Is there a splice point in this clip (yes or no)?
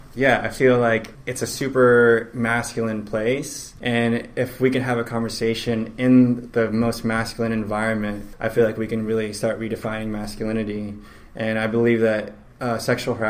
no